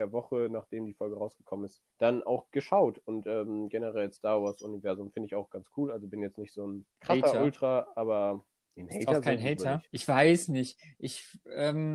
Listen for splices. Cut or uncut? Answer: cut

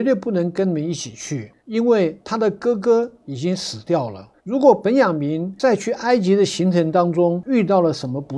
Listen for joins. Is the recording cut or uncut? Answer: cut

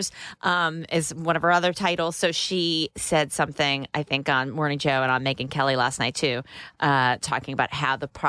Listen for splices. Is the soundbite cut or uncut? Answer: uncut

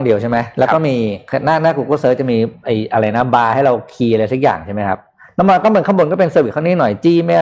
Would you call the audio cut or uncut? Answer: uncut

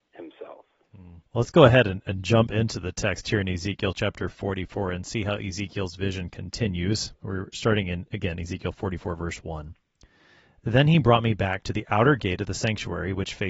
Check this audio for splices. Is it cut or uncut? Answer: cut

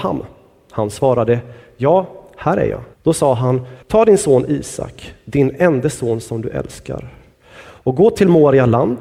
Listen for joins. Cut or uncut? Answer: cut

